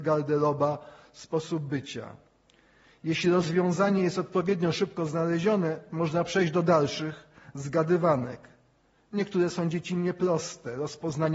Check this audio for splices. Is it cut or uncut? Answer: uncut